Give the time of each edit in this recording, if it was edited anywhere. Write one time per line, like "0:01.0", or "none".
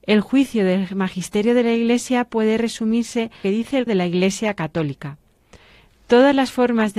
0:03.4
0:03.9